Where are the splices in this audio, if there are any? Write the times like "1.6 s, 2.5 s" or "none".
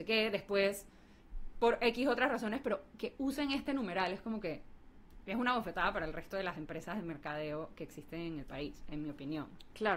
none